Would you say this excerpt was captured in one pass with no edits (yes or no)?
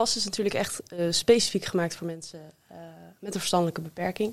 yes